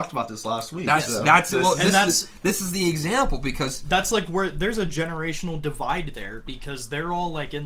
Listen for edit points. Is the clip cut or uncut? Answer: uncut